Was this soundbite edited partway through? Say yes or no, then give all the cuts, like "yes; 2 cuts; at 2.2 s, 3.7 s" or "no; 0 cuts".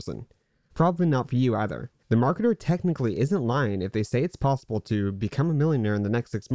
yes; 1 cut; at 2.0 s